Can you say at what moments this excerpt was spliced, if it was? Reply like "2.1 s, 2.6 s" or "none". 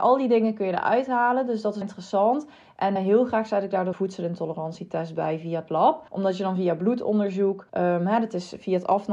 1.8 s, 3.0 s, 3.9 s, 6.1 s, 7.7 s